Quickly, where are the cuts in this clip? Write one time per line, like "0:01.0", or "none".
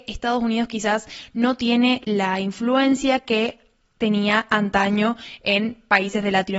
none